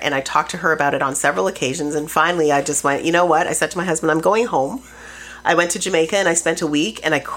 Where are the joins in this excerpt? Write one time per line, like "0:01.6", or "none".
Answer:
none